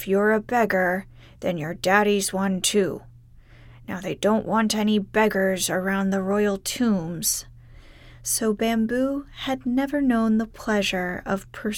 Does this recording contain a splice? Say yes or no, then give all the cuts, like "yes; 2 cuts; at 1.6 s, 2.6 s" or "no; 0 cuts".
no; 0 cuts